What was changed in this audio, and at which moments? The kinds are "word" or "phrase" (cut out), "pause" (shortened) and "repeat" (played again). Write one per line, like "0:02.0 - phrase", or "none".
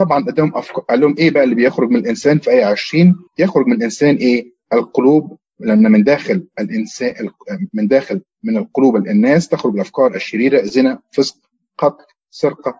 0:03.3 - pause
0:04.6 - pause